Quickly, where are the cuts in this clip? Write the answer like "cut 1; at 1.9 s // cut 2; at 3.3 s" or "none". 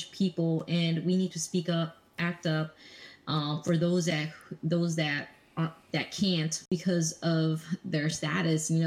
none